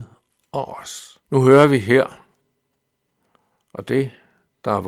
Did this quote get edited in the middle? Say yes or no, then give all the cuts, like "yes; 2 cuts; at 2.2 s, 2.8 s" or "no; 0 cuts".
yes; 1 cut; at 1.3 s